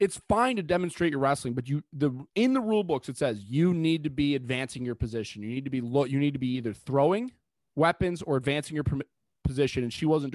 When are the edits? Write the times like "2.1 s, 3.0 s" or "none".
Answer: none

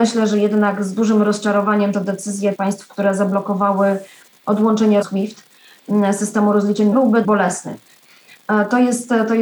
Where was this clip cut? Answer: 1.9 s, 2.5 s, 5.0 s, 6.9 s, 7.2 s

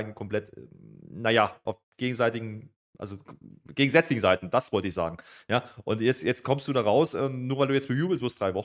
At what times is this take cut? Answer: 1.8 s

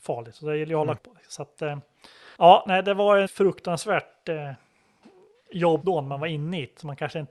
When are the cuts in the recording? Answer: 1.0 s, 2.3 s, 3.3 s, 5.8 s

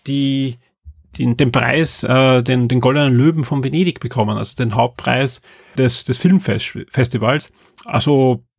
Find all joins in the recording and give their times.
5.8 s

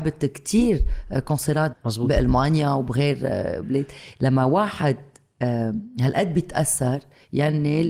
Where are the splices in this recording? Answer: 1.7 s, 3.6 s

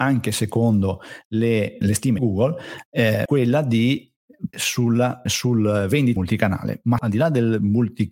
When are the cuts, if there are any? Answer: 1.8 s, 2.2 s, 3.3 s, 4.5 s, 5.3 s, 6.2 s, 7.0 s

